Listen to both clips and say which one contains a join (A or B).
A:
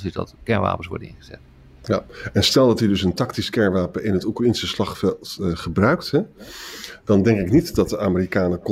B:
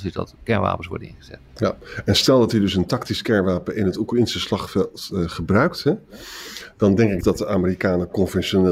B